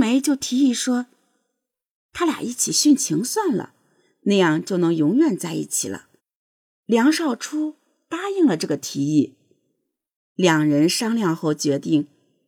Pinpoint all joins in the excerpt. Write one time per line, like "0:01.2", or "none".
0:06.2